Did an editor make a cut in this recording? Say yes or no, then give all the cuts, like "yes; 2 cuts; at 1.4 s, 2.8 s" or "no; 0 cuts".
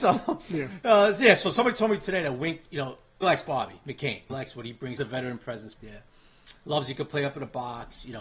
yes; 4 cuts; at 3.2 s, 4.3 s, 5.0 s, 5.8 s